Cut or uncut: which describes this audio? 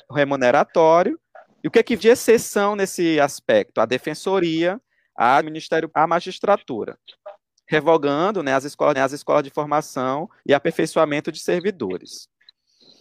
cut